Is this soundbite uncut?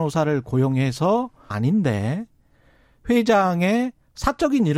no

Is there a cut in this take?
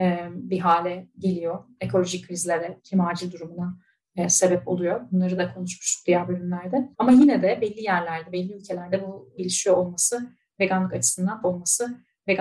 yes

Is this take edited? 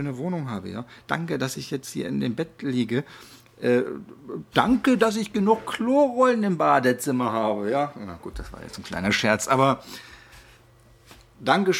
no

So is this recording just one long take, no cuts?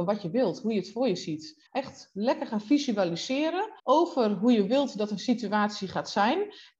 no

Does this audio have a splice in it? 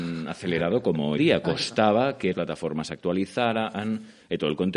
yes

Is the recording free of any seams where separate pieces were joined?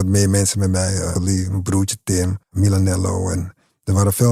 no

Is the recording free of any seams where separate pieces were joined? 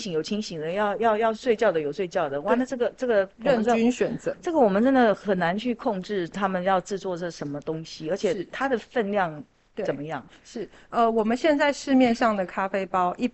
no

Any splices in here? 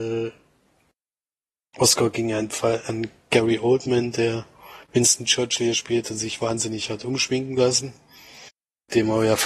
yes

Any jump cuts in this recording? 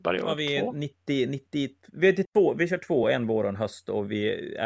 no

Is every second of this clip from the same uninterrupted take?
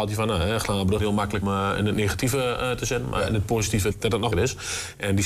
no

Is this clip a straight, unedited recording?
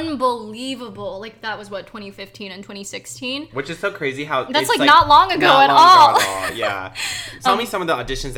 no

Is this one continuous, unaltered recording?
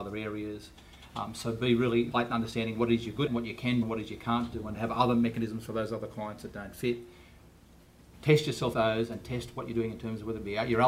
no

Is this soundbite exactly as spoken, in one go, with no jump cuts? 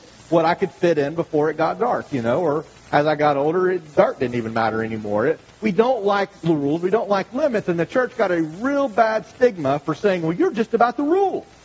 yes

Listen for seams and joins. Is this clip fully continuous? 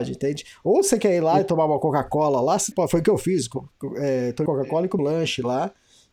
no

